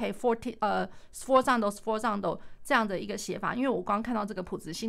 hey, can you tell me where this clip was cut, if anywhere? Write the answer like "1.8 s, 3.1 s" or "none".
none